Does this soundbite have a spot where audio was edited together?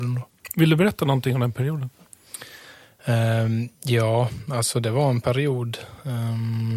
no; 0 cuts

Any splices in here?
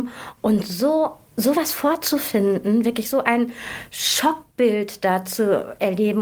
no; 0 cuts

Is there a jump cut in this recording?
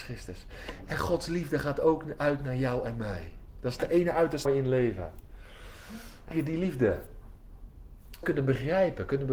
yes; 4 cuts; at 3.5 s, 4.5 s, 6.3 s, 8.2 s

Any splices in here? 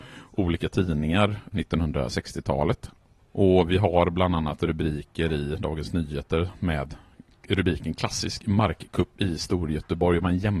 yes; 1 cut; at 1.5 s

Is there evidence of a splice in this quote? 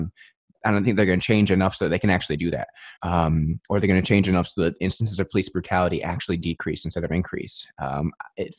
yes; 1 cut; at 3.0 s

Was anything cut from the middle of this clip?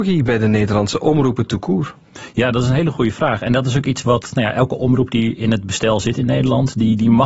no; 0 cuts

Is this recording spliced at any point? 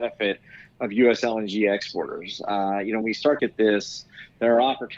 yes; 2 cuts; at 3.0 s, 3.4 s

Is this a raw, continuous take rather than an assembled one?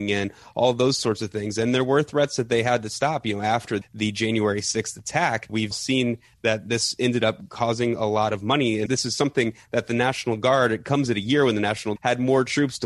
no; 4 cuts; at 3.8 s, 5.7 s, 8.9 s, 12.0 s

